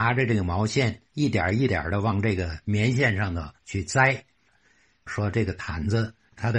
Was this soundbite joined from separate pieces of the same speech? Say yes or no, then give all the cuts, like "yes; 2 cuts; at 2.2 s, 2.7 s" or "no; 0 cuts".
yes; 3 cuts; at 1.1 s, 2.6 s, 3.6 s